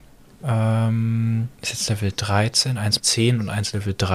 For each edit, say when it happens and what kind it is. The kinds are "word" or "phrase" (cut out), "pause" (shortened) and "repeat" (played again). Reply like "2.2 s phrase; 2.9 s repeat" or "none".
1.5 s pause; 3.0 s word